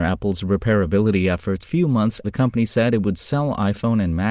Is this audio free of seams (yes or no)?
no